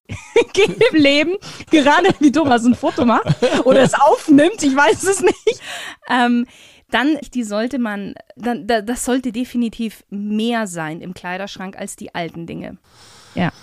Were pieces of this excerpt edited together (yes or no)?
yes